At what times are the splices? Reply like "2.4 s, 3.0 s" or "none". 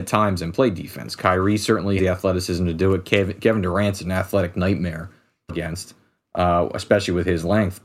2.0 s, 5.5 s